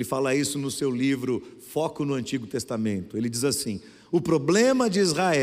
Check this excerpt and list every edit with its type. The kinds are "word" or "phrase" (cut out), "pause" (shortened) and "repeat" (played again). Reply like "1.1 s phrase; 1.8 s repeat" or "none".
none